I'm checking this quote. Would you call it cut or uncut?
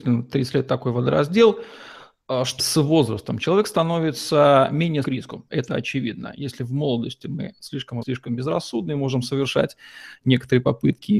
cut